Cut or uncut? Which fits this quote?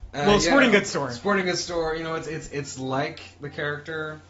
uncut